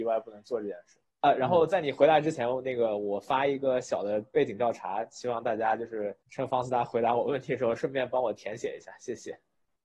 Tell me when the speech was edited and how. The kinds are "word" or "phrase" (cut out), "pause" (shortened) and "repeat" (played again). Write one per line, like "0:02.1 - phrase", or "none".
0:01.1 - pause
0:06.2 - pause

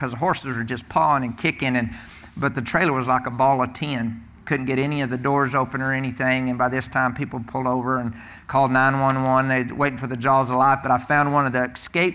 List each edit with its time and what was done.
none

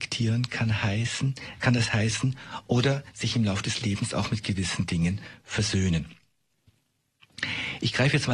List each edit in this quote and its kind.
none

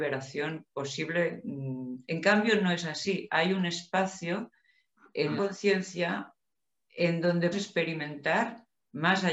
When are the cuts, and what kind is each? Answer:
0:02.0 - pause
0:05.4 - word
0:07.5 - word

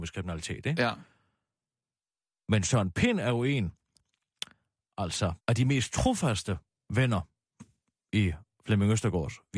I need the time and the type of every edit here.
0:05.4 - pause

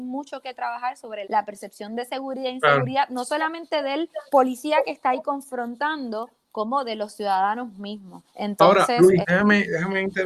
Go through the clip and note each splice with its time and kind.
0:01.2 - word
0:04.3 - pause
0:08.3 - pause
0:09.2 - word

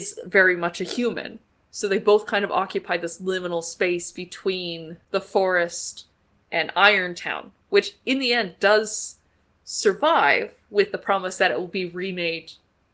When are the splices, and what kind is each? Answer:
none

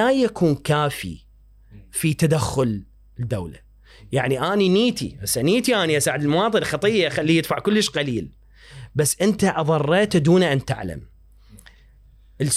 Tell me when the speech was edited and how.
none

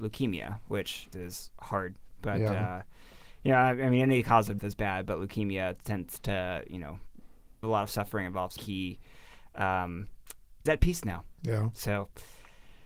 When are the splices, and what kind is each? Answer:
0:01.1 - word
0:04.6 - word
0:07.6 - word
0:08.6 - word
0:10.7 - word

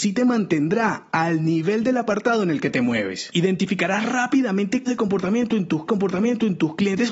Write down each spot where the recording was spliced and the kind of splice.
0:04.9 - word
0:05.9 - repeat

